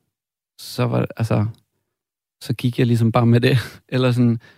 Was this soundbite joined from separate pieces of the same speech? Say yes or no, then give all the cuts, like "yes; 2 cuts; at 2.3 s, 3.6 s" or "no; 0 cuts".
no; 0 cuts